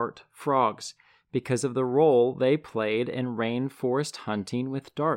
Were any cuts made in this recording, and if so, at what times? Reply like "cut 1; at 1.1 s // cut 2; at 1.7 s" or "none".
none